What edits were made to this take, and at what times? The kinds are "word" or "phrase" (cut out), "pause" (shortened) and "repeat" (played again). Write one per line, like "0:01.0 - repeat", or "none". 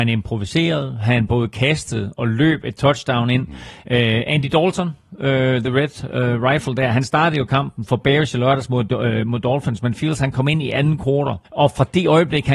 0:11.4 - pause